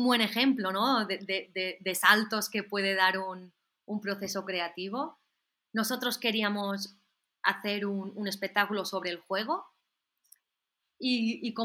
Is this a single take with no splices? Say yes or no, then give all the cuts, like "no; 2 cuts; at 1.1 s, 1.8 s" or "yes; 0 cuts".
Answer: yes; 0 cuts